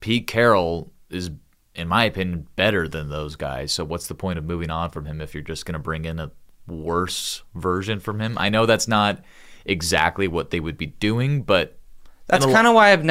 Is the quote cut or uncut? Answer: uncut